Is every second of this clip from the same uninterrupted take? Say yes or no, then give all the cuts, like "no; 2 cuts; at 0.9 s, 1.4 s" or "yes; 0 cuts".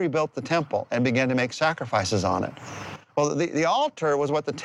yes; 0 cuts